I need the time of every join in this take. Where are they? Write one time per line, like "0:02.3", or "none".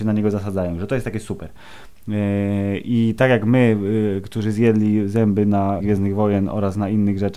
0:05.8

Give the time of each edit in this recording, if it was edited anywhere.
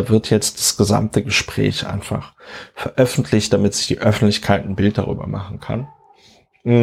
none

